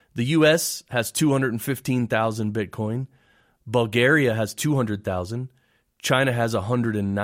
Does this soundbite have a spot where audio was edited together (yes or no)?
no